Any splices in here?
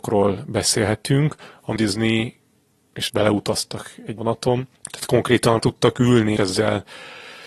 yes; 6 cuts; at 1.8 s, 3.1 s, 4.2 s, 4.7 s, 5.6 s, 6.4 s

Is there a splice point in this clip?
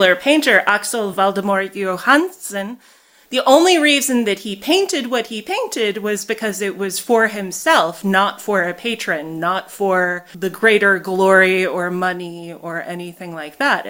no; 0 cuts

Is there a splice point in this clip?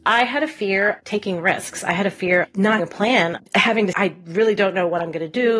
yes; 5 cuts; at 1.0 s, 2.4 s, 2.8 s, 3.4 s, 3.9 s

